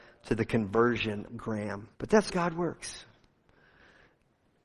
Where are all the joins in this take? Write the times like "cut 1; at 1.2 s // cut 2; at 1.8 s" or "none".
cut 1; at 1.3 s // cut 2; at 1.9 s // cut 3; at 2.3 s